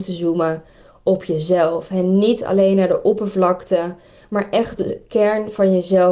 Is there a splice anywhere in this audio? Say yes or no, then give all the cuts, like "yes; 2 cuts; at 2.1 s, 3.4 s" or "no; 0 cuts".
yes; 1 cut; at 4.8 s